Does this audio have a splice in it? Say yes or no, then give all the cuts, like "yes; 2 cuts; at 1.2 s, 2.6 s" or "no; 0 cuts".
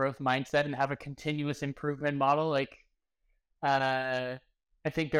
no; 0 cuts